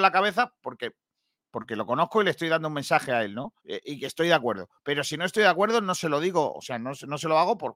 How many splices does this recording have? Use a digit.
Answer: 1